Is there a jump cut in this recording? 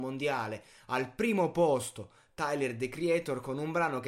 no; 0 cuts

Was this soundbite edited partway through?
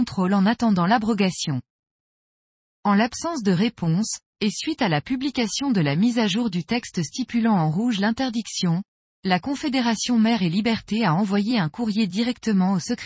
no; 0 cuts

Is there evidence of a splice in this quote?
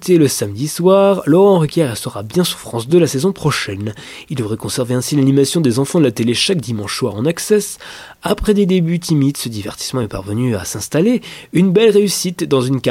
no; 0 cuts

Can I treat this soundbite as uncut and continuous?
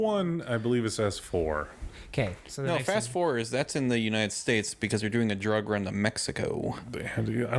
yes; 0 cuts

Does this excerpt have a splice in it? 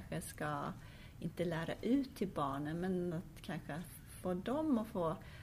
no; 0 cuts

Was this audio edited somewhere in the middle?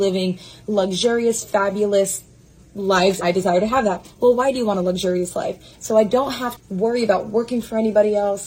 yes; 2 cuts; at 3.2 s, 6.6 s

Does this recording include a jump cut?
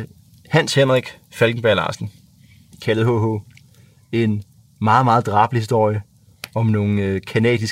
no; 0 cuts

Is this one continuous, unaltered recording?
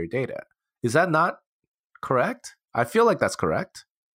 yes; 0 cuts

